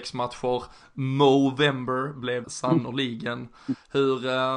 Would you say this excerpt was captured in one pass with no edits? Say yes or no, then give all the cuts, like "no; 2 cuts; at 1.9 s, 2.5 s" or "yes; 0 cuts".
no; 1 cut; at 2.4 s